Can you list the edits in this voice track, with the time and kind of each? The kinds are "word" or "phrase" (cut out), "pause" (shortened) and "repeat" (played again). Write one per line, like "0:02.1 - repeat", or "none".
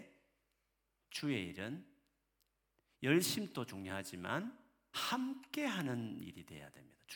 0:04.9 - word